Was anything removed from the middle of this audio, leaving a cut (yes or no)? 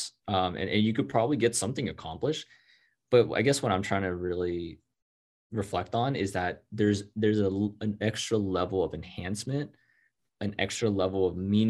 no